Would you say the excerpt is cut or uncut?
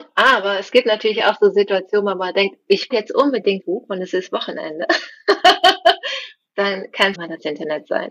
cut